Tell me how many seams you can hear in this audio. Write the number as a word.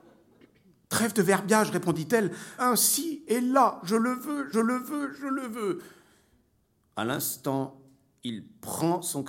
two